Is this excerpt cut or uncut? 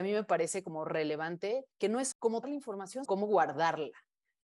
cut